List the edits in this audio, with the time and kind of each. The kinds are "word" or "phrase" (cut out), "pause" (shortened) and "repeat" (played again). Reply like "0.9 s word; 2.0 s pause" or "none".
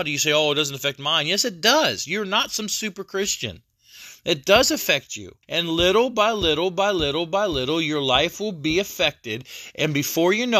5.4 s pause